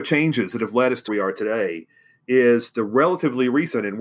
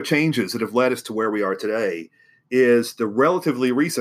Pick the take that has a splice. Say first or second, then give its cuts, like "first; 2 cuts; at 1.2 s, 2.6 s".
first; 1 cut; at 1.1 s